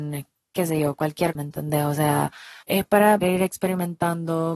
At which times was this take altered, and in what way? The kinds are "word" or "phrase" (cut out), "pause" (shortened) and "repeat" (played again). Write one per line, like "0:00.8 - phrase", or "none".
0:01.3 - word
0:02.6 - pause
0:03.2 - word